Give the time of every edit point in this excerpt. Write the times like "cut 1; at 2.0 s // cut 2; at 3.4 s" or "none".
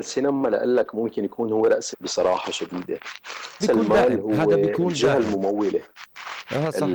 cut 1; at 1.9 s // cut 2; at 3.6 s

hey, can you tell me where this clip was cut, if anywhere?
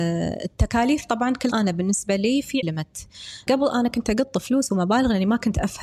cut 1; at 1.5 s // cut 2; at 2.6 s // cut 3; at 3.5 s

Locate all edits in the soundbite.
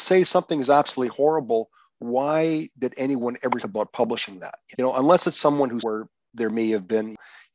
cut 1; at 3.6 s // cut 2; at 4.7 s // cut 3; at 5.8 s

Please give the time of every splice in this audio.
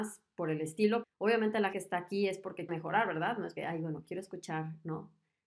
cut 1; at 1.0 s // cut 2; at 1.7 s // cut 3; at 2.7 s // cut 4; at 3.6 s

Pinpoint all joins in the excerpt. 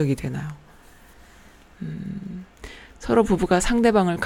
none

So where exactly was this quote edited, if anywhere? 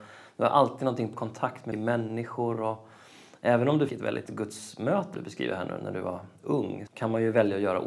cut 1; at 1.1 s // cut 2; at 1.7 s // cut 3; at 3.9 s // cut 4; at 4.3 s // cut 5; at 5.1 s // cut 6; at 6.9 s

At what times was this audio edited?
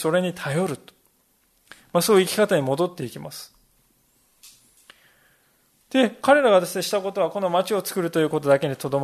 none

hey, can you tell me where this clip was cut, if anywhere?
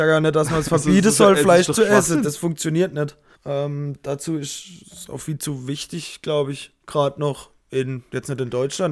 cut 1; at 3.3 s // cut 2; at 4.8 s // cut 3; at 6.8 s

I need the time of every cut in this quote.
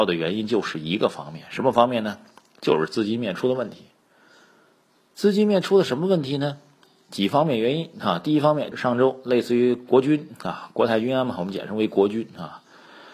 cut 1; at 8.7 s

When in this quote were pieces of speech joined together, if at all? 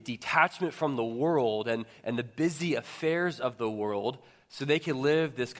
none

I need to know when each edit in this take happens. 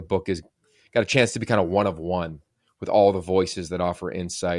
none

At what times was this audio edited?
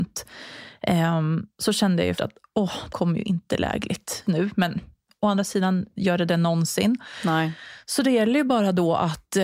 cut 1; at 2.2 s // cut 2; at 2.9 s // cut 3; at 4.3 s

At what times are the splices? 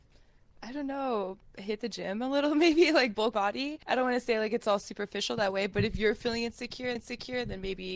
cut 1; at 3.3 s // cut 2; at 3.8 s // cut 3; at 7.0 s

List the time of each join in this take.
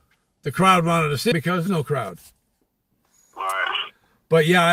cut 1; at 1.3 s // cut 2; at 1.7 s

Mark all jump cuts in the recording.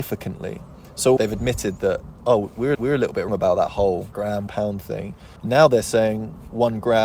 cut 1; at 1.2 s // cut 2; at 2.7 s // cut 3; at 3.3 s // cut 4; at 4.1 s // cut 5; at 4.5 s // cut 6; at 5.4 s

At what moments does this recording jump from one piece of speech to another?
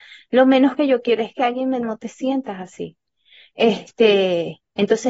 cut 1; at 1.2 s // cut 2; at 1.8 s

